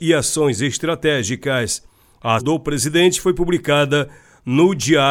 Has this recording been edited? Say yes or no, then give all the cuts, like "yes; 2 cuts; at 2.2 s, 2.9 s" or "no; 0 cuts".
yes; 1 cut; at 2.4 s